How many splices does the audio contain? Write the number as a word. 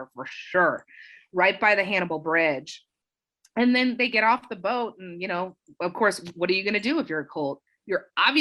zero